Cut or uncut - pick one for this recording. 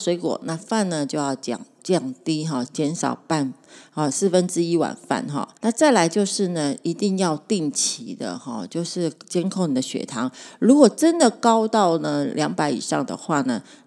cut